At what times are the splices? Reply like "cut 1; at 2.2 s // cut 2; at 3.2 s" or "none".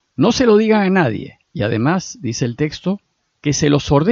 cut 1; at 1.4 s